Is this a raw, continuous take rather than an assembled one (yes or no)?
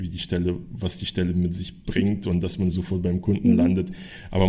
yes